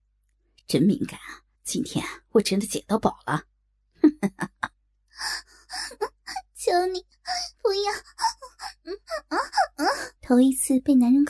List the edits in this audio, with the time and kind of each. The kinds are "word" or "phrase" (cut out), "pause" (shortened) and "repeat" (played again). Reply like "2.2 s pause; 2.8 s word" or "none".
1.5 s pause; 4.7 s pause; 10.2 s pause